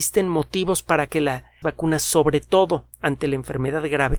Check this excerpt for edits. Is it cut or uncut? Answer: cut